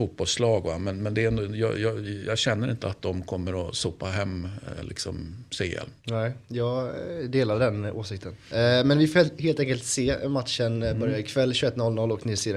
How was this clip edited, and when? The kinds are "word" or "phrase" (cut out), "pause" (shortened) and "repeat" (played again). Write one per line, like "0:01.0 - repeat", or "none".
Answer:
none